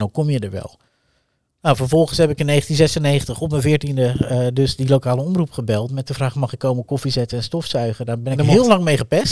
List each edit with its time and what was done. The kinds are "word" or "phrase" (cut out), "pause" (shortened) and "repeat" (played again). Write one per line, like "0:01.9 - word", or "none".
none